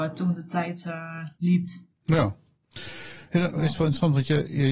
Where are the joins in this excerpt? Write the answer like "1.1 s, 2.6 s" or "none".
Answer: 1.3 s, 3.5 s